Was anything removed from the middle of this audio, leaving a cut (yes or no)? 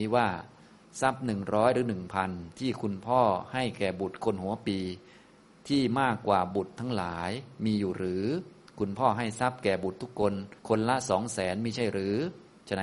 yes